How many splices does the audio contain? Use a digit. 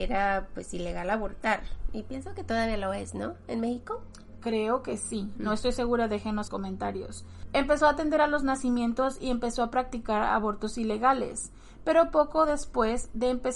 1